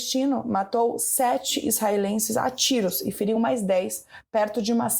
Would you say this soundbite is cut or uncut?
uncut